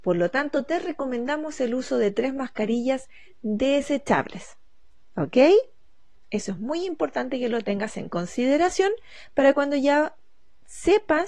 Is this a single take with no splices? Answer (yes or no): yes